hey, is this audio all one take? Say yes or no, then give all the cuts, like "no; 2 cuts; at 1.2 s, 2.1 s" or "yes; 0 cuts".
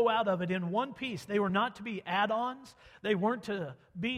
yes; 0 cuts